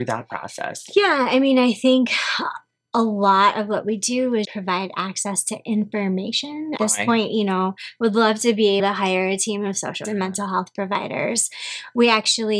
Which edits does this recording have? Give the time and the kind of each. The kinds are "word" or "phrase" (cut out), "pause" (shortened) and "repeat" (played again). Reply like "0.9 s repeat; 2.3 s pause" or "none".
4.4 s word; 6.8 s word; 8.8 s word; 10.0 s word